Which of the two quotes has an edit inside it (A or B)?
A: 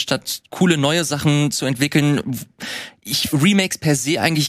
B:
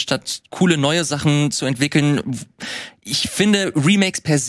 A